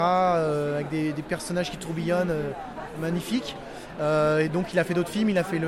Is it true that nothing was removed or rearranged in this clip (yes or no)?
yes